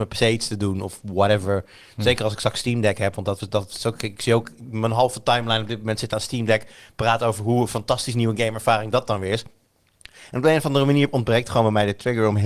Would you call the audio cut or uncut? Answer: uncut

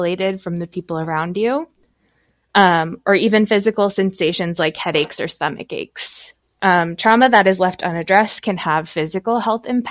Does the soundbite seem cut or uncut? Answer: uncut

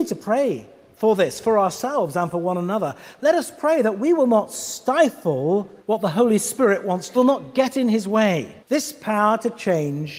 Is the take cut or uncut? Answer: cut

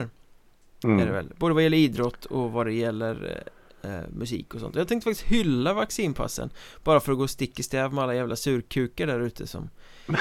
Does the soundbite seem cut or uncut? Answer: uncut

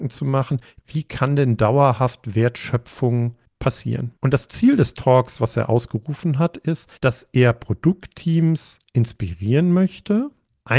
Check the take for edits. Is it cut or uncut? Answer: cut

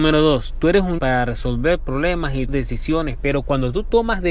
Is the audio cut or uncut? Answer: cut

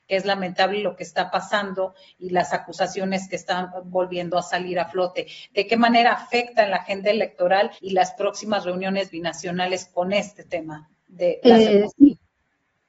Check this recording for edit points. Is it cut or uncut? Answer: cut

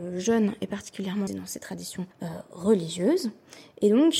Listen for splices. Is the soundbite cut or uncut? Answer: cut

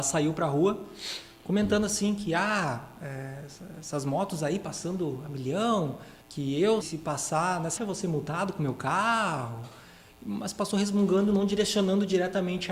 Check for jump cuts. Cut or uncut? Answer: cut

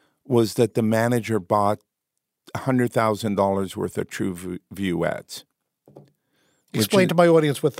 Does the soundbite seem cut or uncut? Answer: uncut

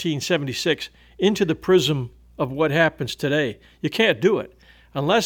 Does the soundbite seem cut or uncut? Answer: uncut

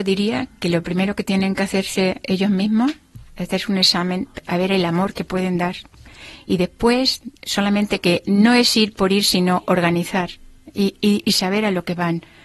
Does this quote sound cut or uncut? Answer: uncut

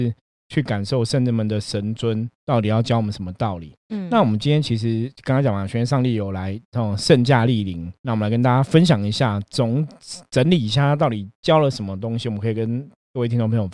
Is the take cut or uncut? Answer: cut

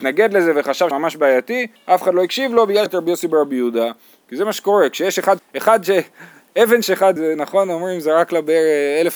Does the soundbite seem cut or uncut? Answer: cut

